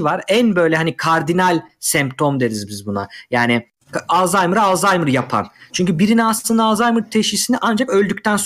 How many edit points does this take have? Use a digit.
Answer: 0